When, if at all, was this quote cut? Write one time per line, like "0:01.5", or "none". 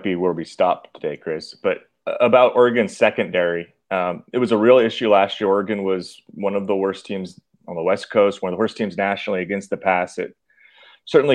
none